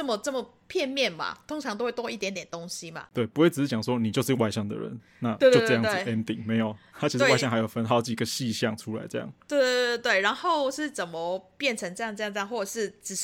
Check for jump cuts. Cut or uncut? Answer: uncut